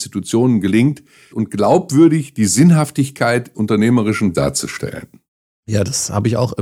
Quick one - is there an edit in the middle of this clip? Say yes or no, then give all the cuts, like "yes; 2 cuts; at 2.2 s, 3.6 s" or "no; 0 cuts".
yes; 3 cuts; at 1.3 s, 3.5 s, 4.3 s